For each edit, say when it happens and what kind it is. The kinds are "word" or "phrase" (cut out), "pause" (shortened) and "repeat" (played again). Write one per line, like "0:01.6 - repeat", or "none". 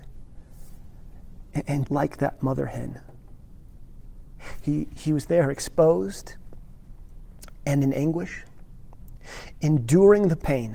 0:01.9 - word